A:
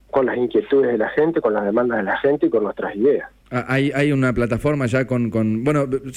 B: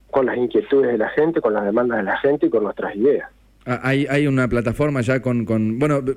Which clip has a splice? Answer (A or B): A